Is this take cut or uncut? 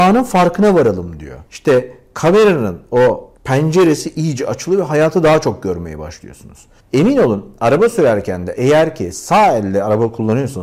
cut